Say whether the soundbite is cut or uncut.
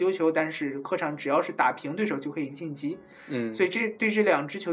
uncut